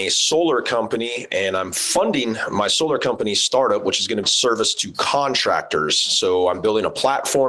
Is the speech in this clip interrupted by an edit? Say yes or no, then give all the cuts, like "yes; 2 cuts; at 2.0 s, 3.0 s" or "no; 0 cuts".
yes; 1 cut; at 4.2 s